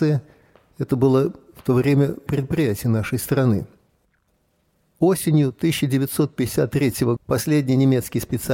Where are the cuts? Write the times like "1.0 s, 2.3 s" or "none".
2.3 s, 7.2 s